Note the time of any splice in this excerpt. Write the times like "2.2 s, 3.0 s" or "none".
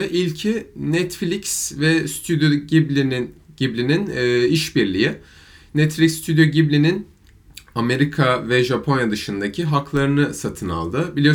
none